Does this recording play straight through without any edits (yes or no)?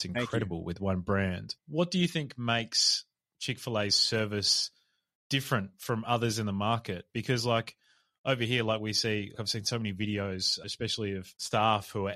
yes